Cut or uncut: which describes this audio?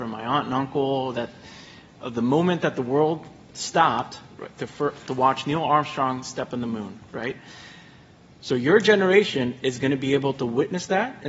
uncut